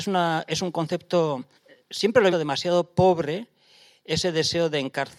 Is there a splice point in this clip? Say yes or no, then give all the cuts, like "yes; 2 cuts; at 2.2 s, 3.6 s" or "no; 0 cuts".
yes; 2 cuts; at 1.6 s, 2.3 s